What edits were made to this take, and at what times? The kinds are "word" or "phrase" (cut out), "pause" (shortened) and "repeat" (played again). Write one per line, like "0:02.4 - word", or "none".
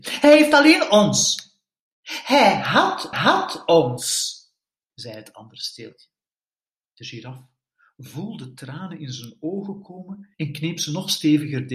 0:03.1 - repeat
0:10.3 - pause